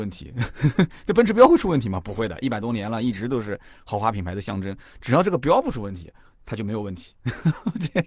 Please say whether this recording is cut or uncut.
uncut